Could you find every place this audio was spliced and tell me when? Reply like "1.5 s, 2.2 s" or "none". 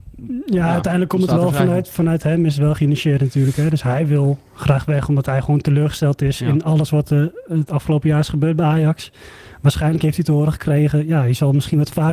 none